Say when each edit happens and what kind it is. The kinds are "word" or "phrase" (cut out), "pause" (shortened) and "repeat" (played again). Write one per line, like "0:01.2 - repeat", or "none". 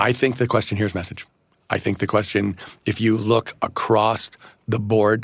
none